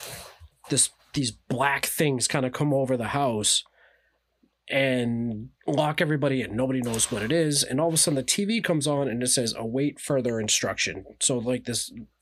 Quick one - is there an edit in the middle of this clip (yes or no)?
yes